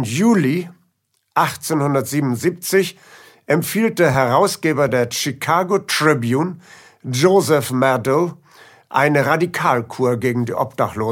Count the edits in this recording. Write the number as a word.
zero